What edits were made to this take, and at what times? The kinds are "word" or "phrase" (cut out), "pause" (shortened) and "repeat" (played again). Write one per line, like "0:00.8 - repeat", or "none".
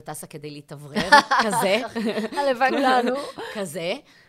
0:02.7 - word